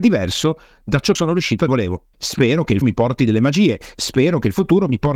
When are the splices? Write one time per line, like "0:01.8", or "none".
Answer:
0:01.1
0:01.7
0:02.1
0:02.8